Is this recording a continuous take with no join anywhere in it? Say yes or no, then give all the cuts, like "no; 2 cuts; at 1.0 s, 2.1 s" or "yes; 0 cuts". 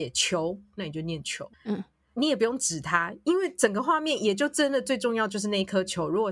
no; 1 cut; at 1.5 s